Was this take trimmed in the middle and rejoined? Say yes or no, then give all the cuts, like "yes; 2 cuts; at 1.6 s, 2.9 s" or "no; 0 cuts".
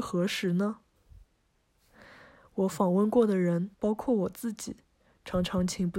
yes; 1 cut; at 3.7 s